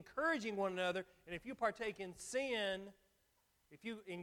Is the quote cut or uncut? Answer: uncut